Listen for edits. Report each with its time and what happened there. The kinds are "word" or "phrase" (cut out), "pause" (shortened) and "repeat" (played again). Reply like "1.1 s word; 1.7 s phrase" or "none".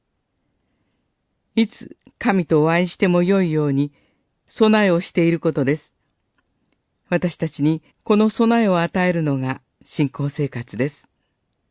7.9 s pause